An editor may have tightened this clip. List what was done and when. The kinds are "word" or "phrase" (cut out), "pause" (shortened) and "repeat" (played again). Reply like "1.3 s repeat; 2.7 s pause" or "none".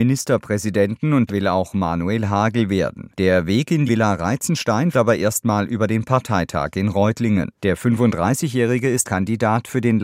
1.3 s word; 3.1 s pause; 3.9 s word; 4.9 s word; 7.6 s pause; 9.0 s word

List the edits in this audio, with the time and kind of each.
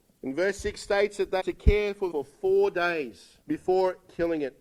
1.4 s word; 2.1 s word; 3.4 s pause

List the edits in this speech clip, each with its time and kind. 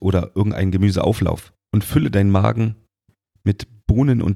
none

